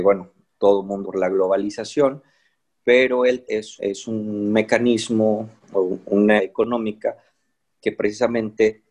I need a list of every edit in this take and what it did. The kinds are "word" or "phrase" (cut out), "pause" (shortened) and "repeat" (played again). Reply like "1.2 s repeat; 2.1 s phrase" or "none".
1.0 s word; 3.4 s word; 3.8 s word; 6.4 s word